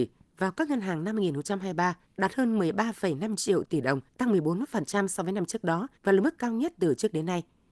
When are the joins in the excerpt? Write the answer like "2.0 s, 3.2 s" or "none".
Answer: 2.1 s, 4.1 s, 6.0 s